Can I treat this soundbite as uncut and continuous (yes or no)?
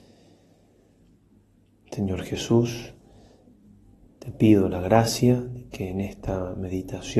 yes